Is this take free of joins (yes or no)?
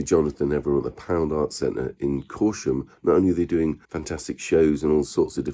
no